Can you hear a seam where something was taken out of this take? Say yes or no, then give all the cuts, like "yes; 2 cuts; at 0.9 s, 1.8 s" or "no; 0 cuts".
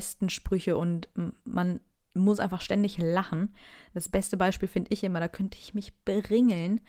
no; 0 cuts